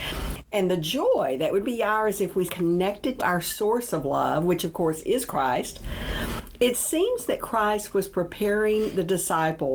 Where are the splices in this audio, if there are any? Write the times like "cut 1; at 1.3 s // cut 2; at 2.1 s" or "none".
cut 1; at 1.6 s // cut 2; at 2.5 s // cut 3; at 3.2 s